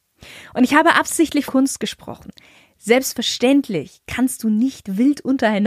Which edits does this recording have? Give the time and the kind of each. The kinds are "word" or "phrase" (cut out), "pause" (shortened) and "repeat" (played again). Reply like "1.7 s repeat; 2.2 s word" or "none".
1.5 s word